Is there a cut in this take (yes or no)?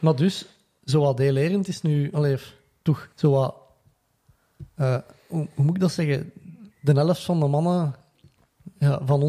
yes